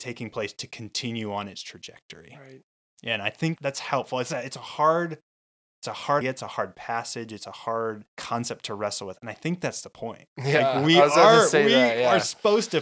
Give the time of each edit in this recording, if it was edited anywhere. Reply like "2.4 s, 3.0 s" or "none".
3.6 s, 6.2 s, 8.1 s